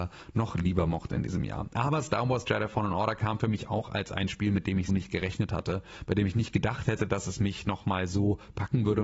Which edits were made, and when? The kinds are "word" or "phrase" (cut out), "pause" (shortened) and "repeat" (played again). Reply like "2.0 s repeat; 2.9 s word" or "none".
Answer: 4.9 s word